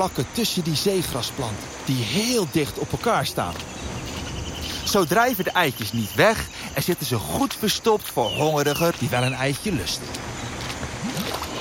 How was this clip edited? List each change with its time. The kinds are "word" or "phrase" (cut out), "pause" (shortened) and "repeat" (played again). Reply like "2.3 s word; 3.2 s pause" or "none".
8.9 s word